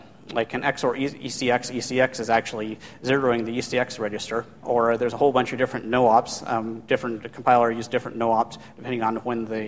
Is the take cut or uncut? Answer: uncut